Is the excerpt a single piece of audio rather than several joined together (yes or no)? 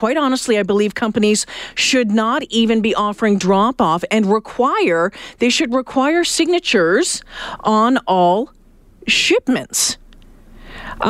yes